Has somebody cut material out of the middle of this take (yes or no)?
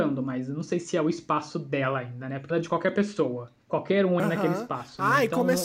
yes